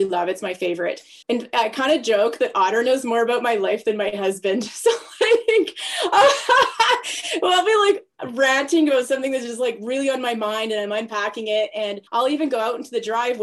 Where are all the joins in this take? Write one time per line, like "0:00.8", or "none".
0:01.2
0:12.1